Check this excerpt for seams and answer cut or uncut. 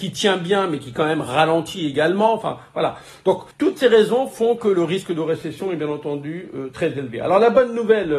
cut